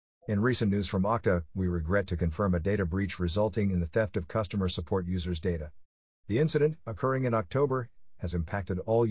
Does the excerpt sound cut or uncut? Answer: uncut